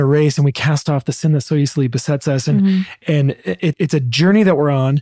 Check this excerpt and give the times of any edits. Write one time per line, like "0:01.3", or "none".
0:03.7

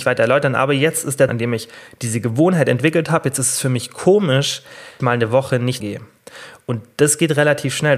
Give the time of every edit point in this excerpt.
0:01.3
0:05.0
0:05.8

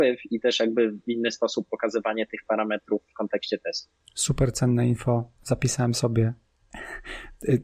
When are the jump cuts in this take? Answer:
none

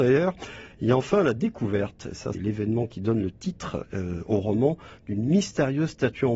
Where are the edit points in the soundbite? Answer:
0:02.3

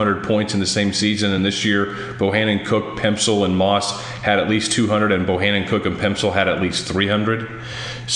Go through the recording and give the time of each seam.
none

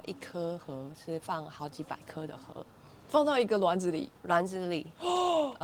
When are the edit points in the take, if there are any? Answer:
0:04.1

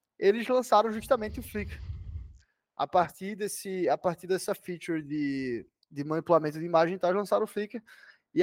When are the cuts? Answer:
0:05.8

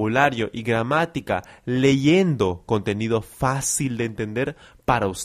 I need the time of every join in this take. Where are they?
none

